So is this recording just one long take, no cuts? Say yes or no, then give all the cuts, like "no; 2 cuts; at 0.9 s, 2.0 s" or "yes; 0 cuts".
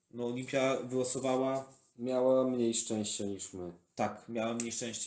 yes; 0 cuts